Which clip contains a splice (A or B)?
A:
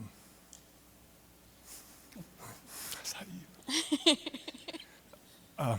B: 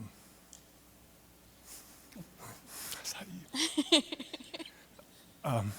B